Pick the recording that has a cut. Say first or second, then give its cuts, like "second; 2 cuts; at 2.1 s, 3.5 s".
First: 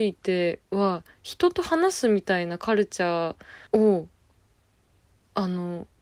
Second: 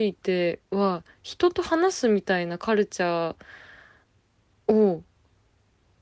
first; 1 cut; at 3.7 s